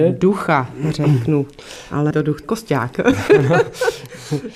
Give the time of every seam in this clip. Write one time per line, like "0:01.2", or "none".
0:02.1
0:02.4